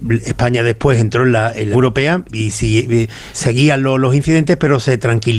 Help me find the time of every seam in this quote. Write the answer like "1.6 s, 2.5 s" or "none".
1.7 s, 2.3 s, 3.3 s

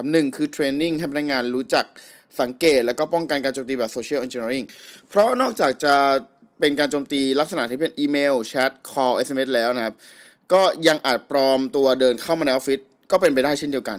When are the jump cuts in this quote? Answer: none

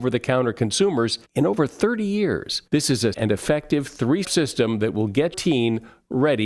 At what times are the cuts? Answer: 1.2 s, 2.7 s, 3.1 s, 4.2 s, 5.3 s

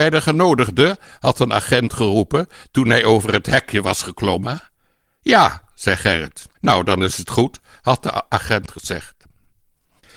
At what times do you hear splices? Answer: 6.5 s

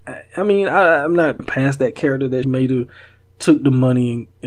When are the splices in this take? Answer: 1.4 s, 2.4 s

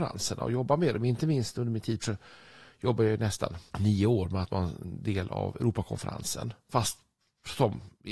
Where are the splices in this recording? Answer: 2.0 s, 3.7 s, 4.4 s

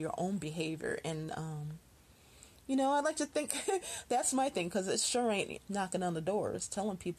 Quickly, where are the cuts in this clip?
5.6 s

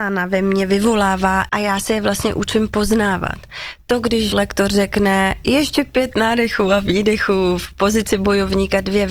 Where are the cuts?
1.5 s, 4.3 s

